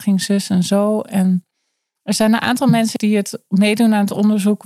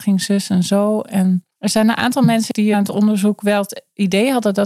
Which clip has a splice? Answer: second; 2 cuts; at 1.5 s, 2.7 s

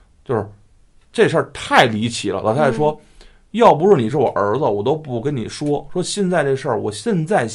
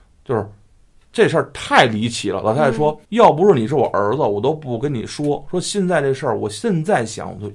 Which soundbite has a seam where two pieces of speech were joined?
second; 1 cut; at 3.0 s

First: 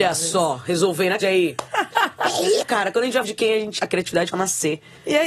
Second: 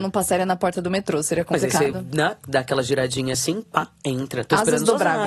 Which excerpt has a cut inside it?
first; 5 cuts; at 1.2 s, 2.6 s, 3.2 s, 3.8 s, 4.3 s

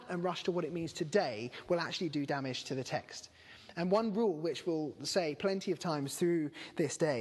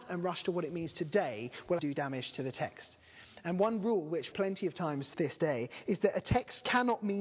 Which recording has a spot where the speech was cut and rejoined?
second; 3 cuts; at 1.8 s, 4.3 s, 5.1 s

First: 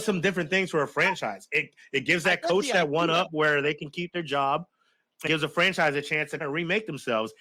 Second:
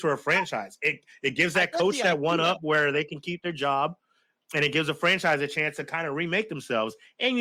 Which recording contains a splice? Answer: first; 2 cuts; at 5.3 s, 6.4 s

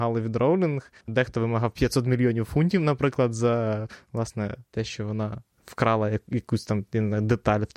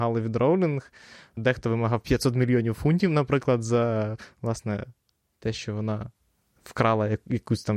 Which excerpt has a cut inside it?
first; 3 cuts; at 1.0 s, 4.7 s, 5.5 s

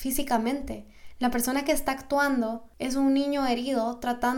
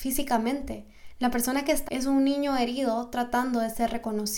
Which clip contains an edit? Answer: second; 1 cut; at 1.8 s

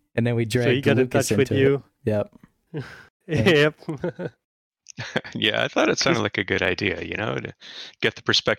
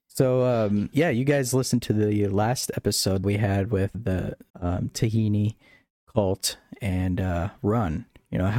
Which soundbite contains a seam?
second; 4 cuts; at 0.9 s, 3.2 s, 3.9 s, 4.5 s

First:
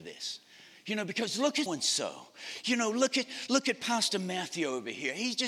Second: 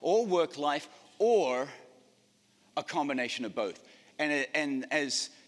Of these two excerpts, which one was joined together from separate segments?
first; 1 cut; at 1.7 s

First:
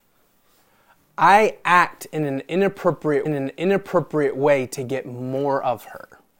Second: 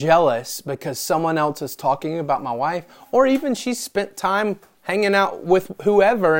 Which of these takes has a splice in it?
first; 1 cut; at 3.3 s

